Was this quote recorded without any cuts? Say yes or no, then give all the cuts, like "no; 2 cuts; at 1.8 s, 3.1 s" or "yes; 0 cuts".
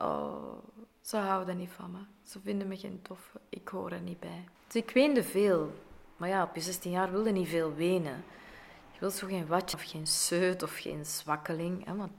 no; 3 cuts; at 0.9 s, 4.6 s, 9.7 s